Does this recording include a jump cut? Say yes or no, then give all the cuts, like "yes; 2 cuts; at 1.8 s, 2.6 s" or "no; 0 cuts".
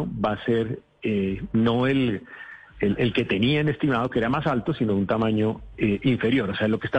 no; 0 cuts